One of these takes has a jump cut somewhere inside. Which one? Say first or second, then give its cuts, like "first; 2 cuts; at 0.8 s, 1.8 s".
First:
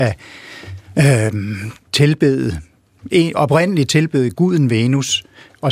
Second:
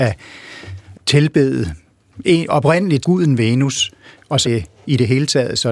second; 3 cuts; at 0.9 s, 3.0 s, 4.4 s